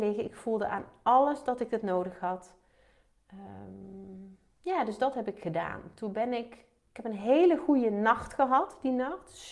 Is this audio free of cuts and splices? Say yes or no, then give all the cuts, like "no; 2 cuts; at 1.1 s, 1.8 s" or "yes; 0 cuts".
yes; 0 cuts